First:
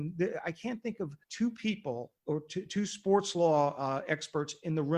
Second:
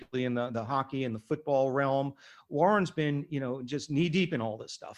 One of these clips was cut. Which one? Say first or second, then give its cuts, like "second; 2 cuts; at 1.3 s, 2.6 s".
first; 2 cuts; at 1.2 s, 2.2 s